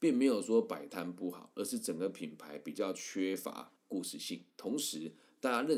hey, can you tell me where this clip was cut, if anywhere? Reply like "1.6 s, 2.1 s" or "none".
3.8 s, 4.5 s